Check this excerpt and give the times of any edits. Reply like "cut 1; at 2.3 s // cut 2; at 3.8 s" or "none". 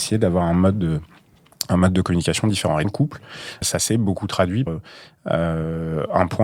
cut 1; at 2.8 s // cut 2; at 3.6 s // cut 3; at 4.7 s